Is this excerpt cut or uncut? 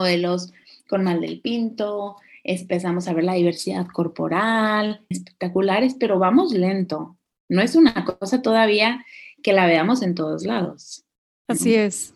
cut